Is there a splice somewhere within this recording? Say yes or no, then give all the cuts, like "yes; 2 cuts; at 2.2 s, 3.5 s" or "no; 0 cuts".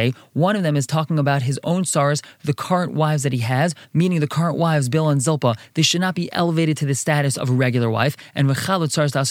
no; 0 cuts